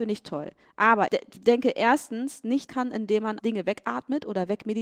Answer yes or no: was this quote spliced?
yes